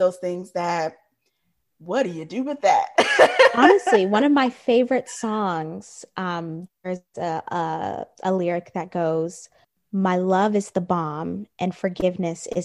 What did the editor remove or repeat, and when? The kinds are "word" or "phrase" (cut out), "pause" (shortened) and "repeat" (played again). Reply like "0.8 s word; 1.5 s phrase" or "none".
none